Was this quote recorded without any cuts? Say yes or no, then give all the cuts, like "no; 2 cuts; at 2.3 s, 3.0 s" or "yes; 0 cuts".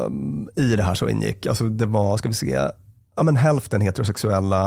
yes; 0 cuts